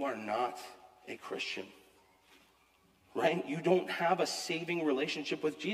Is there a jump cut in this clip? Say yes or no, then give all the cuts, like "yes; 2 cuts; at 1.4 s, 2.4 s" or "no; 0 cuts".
no; 0 cuts